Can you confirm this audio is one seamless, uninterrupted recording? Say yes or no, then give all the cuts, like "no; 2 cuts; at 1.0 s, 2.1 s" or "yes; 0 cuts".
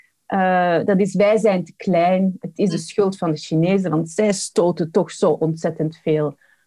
yes; 0 cuts